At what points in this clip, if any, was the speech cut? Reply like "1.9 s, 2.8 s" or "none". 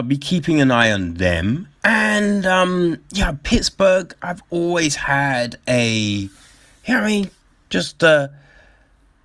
1.8 s